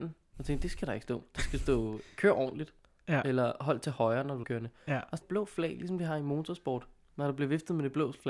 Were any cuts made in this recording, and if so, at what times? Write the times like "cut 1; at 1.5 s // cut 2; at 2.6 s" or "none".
cut 1; at 4.4 s // cut 2; at 5.2 s